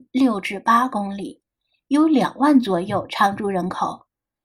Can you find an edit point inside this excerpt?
no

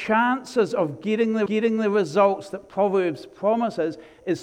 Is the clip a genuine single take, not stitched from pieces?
no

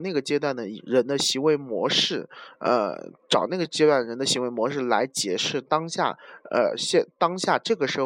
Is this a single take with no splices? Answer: yes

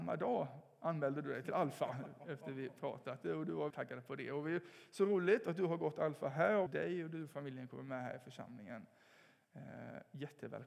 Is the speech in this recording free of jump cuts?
no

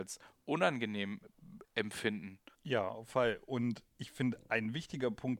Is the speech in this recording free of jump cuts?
no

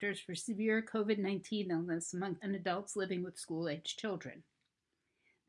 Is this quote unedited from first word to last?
no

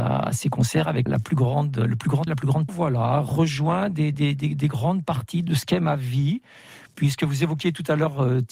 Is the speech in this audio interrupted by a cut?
yes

